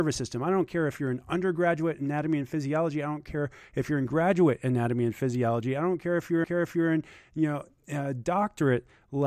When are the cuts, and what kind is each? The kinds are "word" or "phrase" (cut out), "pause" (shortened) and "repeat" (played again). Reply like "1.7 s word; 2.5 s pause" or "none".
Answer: 6.4 s repeat